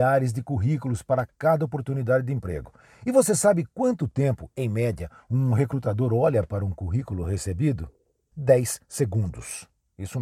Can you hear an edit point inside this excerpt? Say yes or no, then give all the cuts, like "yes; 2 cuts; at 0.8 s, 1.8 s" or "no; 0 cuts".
no; 0 cuts